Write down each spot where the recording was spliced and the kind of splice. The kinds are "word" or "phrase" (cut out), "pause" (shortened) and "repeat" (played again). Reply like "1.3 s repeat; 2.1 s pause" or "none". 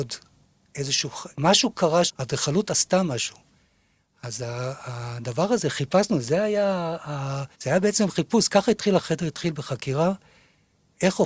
1.3 s pause; 2.1 s word; 7.5 s pause; 9.0 s word

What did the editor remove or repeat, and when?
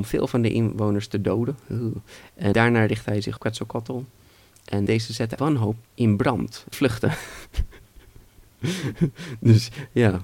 2.5 s word; 3.4 s word; 4.9 s word; 5.4 s word; 5.8 s word; 6.7 s word

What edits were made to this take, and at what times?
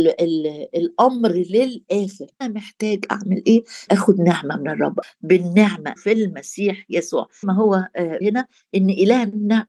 2.4 s word; 3.9 s word; 5.0 s word; 6.0 s word; 7.4 s word; 8.2 s word

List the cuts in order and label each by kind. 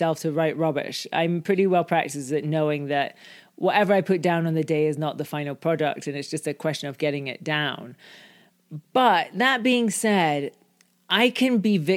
none

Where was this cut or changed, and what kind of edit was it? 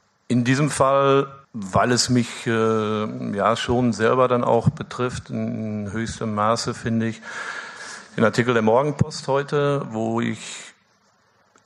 1.4 s pause

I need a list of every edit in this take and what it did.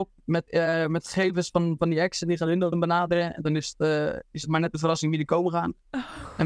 none

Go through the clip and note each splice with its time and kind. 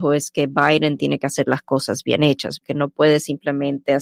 none

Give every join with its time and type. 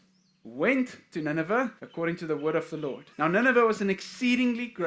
1.8 s pause; 3.1 s pause

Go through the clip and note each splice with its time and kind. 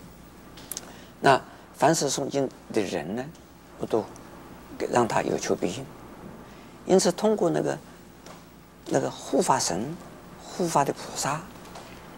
none

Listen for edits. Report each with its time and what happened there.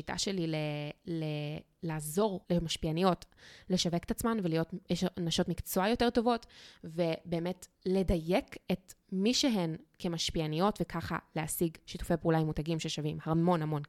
2.4 s pause; 7.7 s pause

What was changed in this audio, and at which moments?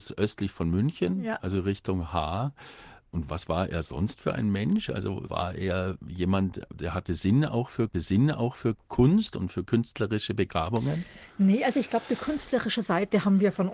7.9 s repeat

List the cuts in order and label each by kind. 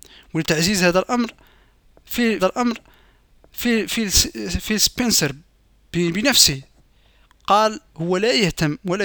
2.4 s repeat; 7.9 s pause

